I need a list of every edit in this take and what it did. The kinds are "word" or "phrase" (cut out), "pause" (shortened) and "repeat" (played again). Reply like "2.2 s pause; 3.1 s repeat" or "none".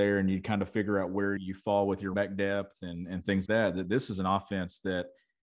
1.4 s word; 2.1 s word; 3.5 s word